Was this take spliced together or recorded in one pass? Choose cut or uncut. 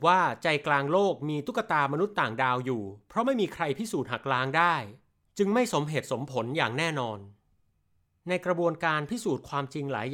uncut